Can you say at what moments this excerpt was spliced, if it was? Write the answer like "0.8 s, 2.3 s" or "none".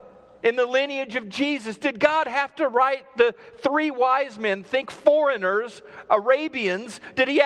none